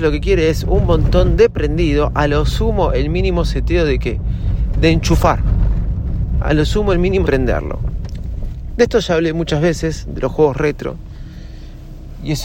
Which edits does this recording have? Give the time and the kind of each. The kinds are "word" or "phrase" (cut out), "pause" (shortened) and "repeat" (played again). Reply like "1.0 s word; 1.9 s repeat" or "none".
7.3 s phrase

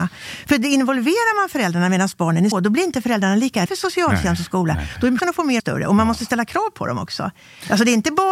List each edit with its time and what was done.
2.5 s word; 3.7 s word; 5.2 s word; 5.6 s phrase

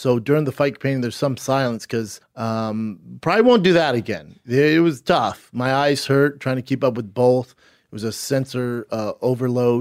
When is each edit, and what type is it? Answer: 2.2 s word

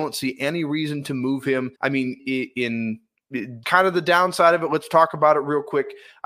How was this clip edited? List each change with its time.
1.8 s pause; 2.2 s word; 3.6 s word

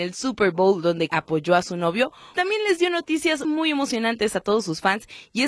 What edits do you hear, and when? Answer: 1.1 s word; 2.3 s word; 3.4 s word

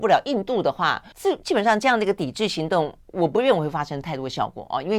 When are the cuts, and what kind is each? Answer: 1.1 s pause

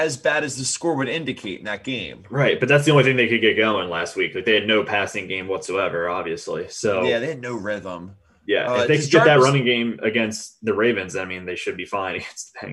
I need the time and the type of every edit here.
none

